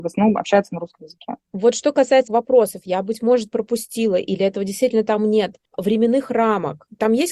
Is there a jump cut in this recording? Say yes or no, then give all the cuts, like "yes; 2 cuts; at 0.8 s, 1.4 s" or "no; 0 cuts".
yes; 2 cuts; at 2.3 s, 5.6 s